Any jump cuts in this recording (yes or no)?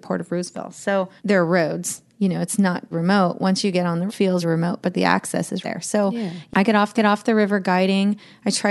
yes